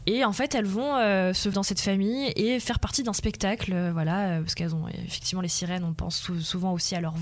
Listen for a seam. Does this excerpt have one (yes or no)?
yes